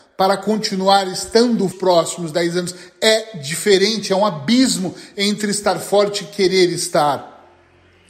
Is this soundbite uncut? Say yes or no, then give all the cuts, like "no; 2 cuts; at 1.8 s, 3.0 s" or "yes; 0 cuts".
no; 1 cut; at 1.7 s